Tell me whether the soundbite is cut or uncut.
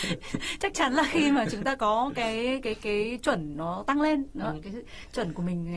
uncut